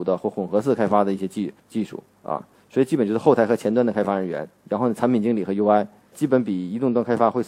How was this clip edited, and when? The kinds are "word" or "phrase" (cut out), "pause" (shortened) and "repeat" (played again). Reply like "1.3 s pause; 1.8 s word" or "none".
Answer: 1.6 s pause; 2.1 s pause; 6.1 s word

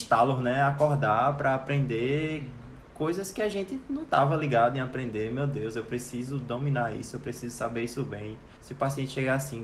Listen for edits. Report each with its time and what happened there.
8.6 s pause

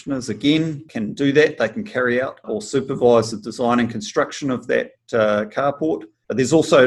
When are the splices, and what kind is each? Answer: none

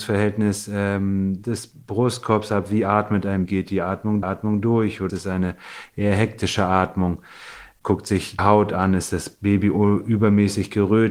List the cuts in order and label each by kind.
1.8 s pause; 3.5 s word; 4.2 s repeat; 5.1 s word; 8.4 s word

